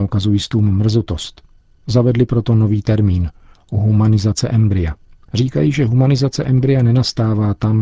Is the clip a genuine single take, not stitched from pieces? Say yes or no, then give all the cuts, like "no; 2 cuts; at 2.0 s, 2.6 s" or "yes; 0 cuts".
yes; 0 cuts